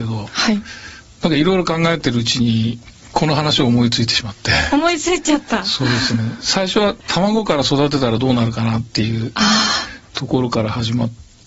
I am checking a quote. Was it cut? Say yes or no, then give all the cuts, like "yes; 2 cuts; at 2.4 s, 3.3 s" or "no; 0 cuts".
yes; 1 cut; at 7.0 s